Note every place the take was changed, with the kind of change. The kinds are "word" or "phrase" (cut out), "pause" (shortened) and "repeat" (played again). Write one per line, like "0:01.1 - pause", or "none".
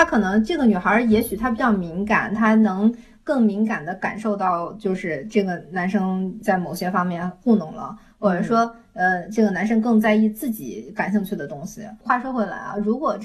none